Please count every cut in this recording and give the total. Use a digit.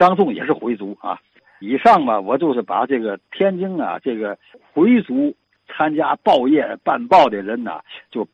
1